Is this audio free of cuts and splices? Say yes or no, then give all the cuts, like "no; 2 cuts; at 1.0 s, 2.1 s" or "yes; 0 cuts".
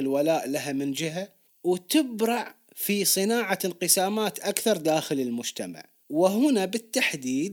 yes; 0 cuts